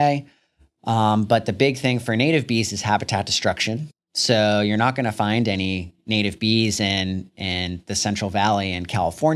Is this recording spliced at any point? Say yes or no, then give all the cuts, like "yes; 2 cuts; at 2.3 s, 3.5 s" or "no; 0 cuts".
no; 0 cuts